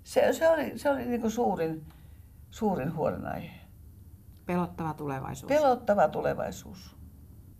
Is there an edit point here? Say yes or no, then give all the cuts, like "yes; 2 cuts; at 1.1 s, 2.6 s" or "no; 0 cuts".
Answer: no; 0 cuts